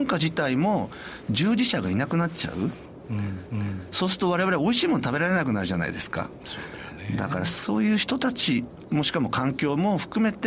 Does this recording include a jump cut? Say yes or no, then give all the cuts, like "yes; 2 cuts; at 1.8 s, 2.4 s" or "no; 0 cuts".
yes; 1 cut; at 3.5 s